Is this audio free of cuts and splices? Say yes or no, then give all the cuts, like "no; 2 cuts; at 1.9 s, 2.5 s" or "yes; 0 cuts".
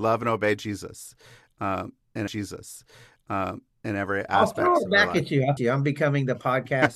no; 2 cuts; at 2.3 s, 5.6 s